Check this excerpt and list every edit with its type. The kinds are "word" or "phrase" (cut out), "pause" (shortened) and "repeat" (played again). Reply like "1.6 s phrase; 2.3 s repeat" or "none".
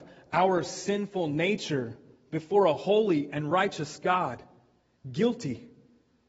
none